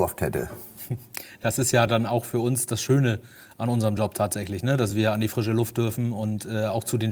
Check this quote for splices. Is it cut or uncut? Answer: uncut